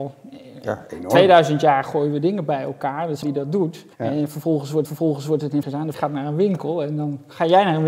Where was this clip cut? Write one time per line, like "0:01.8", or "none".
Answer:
0:03.2
0:03.9
0:04.9
0:05.6
0:05.9